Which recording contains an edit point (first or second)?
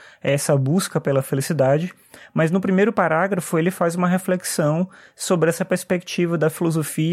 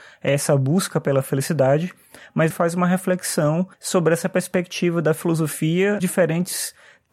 second